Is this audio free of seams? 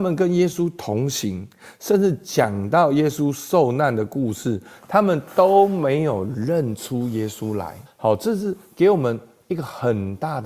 no; 1 cut; at 7.9 s

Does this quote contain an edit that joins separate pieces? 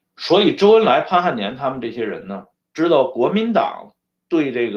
yes; 1 cut; at 2.5 s

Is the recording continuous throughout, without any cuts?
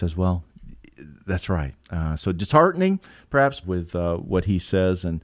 no; 3 cuts; at 1.2 s, 1.8 s, 3.6 s

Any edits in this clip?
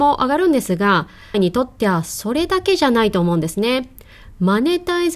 yes; 1 cut; at 1.3 s

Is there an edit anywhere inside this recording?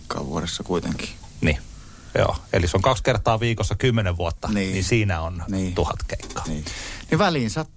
no; 0 cuts

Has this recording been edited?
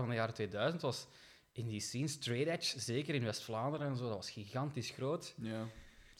no; 0 cuts

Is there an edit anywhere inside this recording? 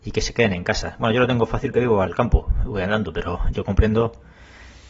yes; 2 cuts; at 1.7 s, 2.1 s

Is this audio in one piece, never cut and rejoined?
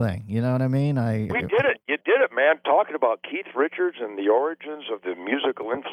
no; 1 cut; at 1.3 s

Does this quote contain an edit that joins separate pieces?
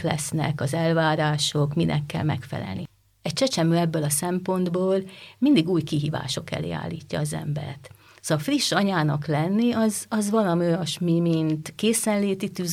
no; 0 cuts

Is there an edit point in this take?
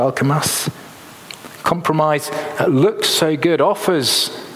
no; 0 cuts

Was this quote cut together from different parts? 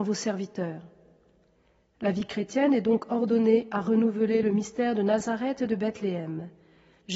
no; 0 cuts

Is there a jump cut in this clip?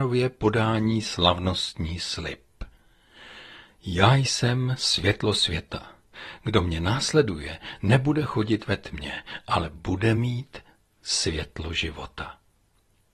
no; 0 cuts

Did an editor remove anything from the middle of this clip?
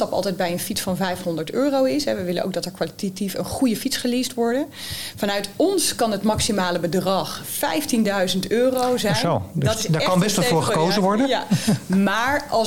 no; 0 cuts

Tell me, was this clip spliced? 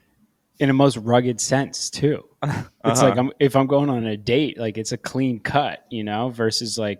no; 0 cuts

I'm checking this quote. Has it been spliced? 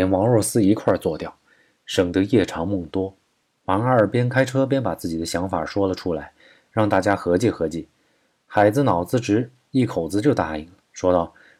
no; 0 cuts

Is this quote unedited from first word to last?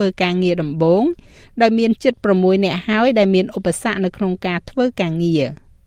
yes; 0 cuts

